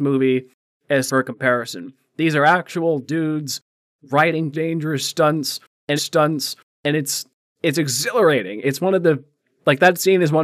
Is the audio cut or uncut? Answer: cut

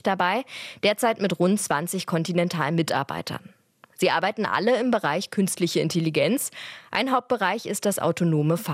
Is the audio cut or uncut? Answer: uncut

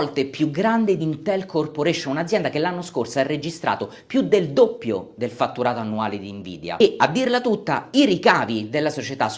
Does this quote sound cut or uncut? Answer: cut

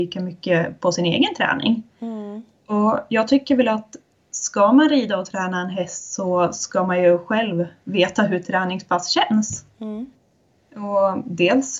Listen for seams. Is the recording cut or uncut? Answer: uncut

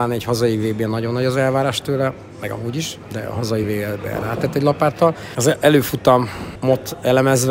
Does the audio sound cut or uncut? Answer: uncut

